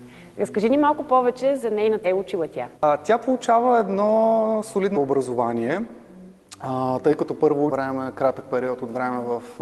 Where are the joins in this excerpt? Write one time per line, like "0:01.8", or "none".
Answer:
0:02.0
0:02.7
0:04.9
0:07.7